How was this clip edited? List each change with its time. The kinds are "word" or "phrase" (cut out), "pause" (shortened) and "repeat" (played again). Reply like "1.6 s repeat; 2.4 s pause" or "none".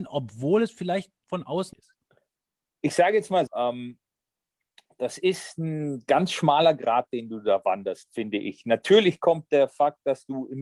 1.2 s pause; 1.7 s phrase; 3.5 s word